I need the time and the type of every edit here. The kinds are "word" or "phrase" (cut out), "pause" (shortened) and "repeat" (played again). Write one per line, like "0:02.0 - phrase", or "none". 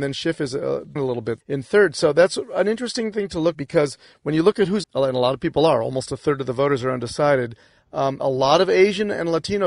0:01.0 - word
0:01.4 - word
0:03.5 - word
0:04.8 - word